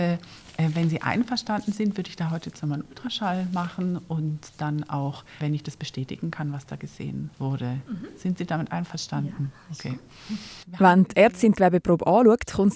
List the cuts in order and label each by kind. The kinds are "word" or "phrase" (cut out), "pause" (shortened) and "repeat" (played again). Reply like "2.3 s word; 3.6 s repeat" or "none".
5.4 s phrase; 7.3 s pause; 10.6 s pause